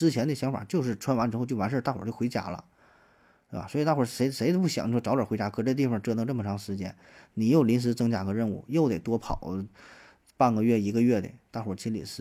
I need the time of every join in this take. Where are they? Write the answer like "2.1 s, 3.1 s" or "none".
none